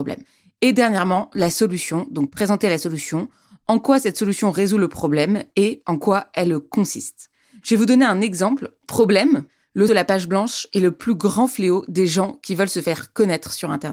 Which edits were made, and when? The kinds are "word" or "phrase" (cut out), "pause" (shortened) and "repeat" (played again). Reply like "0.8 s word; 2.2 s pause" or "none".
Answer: 9.9 s word